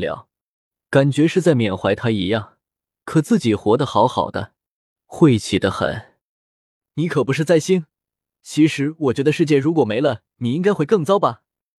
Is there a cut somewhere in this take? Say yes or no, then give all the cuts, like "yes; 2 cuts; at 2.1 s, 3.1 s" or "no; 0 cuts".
no; 0 cuts